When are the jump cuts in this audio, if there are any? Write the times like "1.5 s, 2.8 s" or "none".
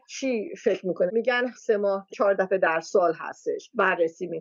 1.1 s, 1.6 s, 2.1 s